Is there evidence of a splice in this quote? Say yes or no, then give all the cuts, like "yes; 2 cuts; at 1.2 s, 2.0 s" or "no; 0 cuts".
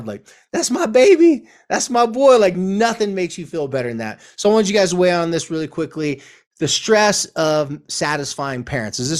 no; 0 cuts